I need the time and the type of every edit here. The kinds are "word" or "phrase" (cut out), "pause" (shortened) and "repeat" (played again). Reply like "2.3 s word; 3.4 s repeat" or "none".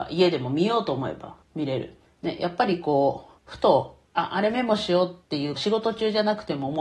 1.4 s pause; 2.0 s pause; 3.4 s pause; 4.1 s pause; 5.2 s pause; 5.6 s phrase